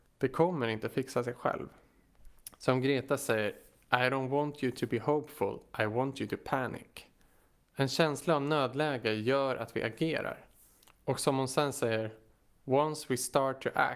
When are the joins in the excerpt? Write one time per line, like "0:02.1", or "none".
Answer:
none